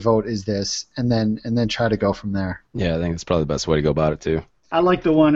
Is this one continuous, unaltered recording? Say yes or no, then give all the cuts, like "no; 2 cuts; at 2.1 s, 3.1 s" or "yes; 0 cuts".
no; 1 cut; at 2.7 s